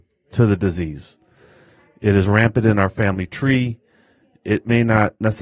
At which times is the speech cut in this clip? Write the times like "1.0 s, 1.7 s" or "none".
none